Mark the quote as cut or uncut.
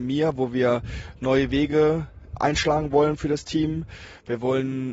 uncut